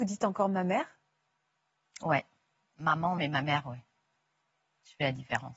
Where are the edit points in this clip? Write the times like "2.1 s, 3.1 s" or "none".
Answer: 3.2 s